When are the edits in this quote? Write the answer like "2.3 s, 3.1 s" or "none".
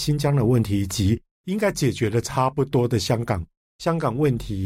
none